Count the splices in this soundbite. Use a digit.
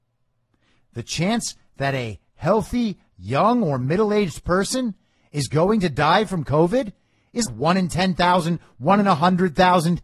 1